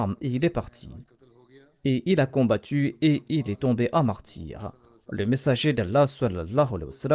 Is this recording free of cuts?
yes; 0 cuts

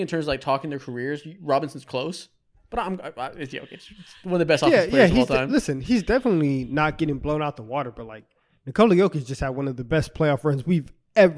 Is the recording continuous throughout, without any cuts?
yes; 0 cuts

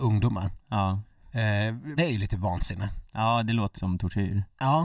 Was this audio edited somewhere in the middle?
yes; 2 cuts; at 2.0 s, 3.7 s

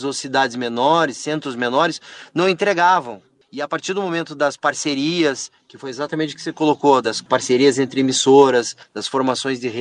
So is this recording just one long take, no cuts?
yes; 0 cuts

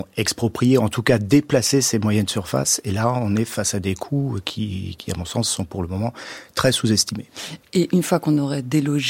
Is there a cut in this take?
no; 0 cuts

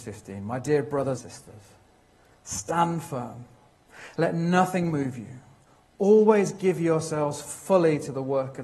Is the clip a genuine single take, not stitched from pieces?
no; 1 cut; at 1.2 s

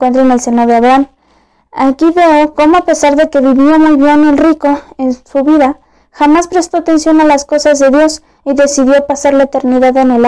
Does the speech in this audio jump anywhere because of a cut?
no; 0 cuts

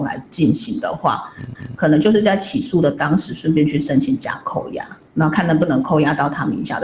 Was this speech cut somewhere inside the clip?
yes; 2 cuts; at 1.5 s, 5.1 s

